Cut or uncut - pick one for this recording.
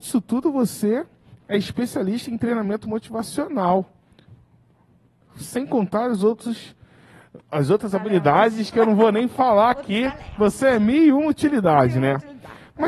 uncut